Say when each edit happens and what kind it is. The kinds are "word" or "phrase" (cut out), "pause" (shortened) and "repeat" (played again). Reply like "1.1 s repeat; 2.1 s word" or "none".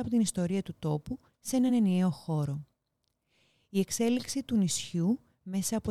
none